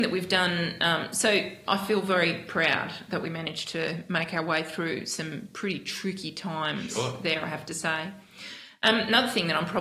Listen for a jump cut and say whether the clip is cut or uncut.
uncut